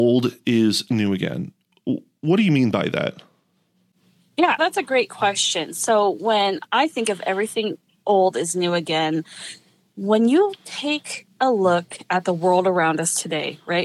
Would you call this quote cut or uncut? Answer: cut